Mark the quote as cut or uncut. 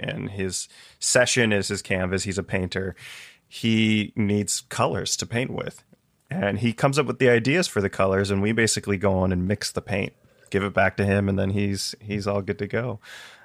uncut